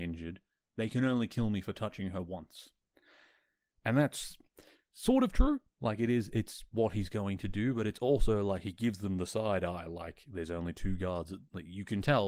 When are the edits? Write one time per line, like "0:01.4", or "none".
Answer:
none